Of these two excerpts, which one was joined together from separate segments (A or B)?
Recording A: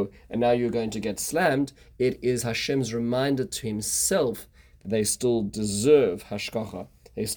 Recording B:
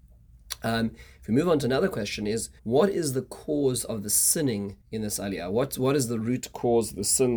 B